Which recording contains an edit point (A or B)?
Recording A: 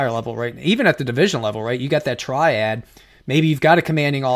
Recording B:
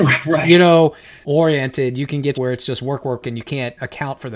B